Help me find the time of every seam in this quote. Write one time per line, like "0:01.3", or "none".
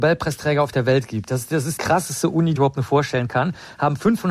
0:01.8
0:02.6